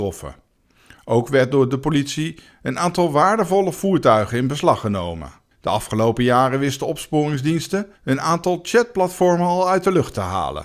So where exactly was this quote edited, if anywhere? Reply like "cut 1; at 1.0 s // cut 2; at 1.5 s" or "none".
cut 1; at 5.5 s // cut 2; at 8.0 s